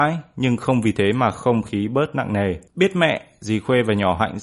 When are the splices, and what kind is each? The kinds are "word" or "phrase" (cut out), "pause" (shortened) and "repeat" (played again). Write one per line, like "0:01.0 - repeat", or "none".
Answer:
0:02.7 - pause